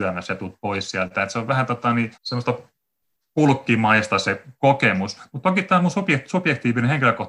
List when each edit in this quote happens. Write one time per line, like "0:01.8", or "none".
0:02.1